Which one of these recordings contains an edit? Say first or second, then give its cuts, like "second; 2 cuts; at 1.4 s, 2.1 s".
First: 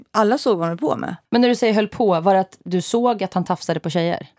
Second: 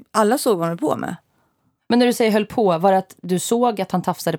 first; 1 cut; at 1.2 s